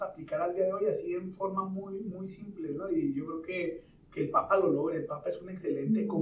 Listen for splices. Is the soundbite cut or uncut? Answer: uncut